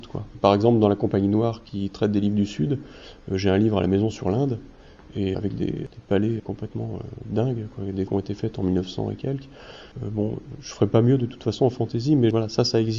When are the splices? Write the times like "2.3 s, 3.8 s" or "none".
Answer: 5.3 s, 6.4 s, 8.1 s, 9.9 s